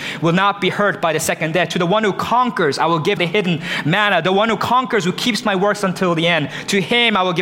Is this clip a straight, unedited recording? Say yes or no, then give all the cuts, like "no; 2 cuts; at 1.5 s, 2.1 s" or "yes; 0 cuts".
no; 1 cut; at 3.2 s